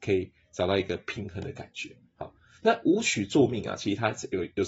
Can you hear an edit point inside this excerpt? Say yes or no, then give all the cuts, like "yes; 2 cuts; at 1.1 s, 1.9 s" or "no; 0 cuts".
no; 0 cuts